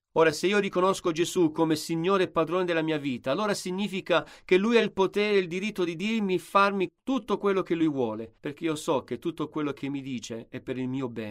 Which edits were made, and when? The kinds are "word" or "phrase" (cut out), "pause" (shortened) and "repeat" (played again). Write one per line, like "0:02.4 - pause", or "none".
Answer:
0:08.4 - pause